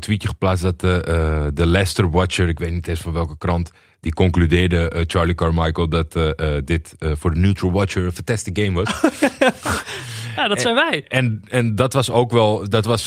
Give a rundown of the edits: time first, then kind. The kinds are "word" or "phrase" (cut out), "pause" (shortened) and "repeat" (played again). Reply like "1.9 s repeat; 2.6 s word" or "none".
none